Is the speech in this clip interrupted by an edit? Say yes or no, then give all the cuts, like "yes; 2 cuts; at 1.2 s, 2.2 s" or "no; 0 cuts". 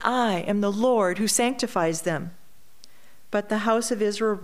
no; 0 cuts